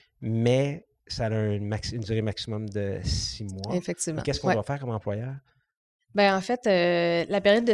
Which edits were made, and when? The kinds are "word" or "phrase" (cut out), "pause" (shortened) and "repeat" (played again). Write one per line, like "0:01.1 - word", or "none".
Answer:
none